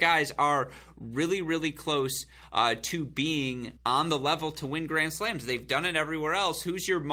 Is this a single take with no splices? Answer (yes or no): no